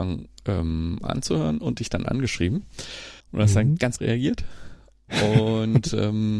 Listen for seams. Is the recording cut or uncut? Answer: cut